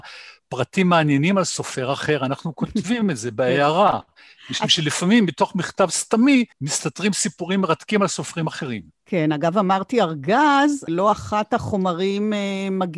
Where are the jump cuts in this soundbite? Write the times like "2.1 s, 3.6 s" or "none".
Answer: 6.5 s, 10.9 s